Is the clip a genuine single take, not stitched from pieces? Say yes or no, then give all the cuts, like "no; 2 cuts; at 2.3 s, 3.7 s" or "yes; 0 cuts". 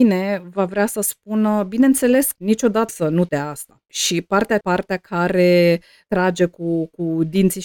no; 4 cuts; at 2.4 s, 2.9 s, 3.3 s, 4.6 s